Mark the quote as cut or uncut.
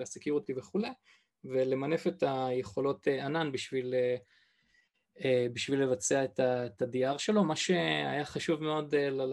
uncut